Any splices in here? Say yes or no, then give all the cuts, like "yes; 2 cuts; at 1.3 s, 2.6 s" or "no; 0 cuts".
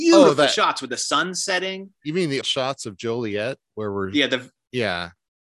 yes; 1 cut; at 2.4 s